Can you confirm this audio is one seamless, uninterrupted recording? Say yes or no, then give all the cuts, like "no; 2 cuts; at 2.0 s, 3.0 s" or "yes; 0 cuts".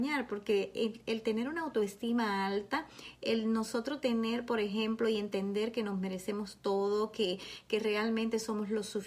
yes; 0 cuts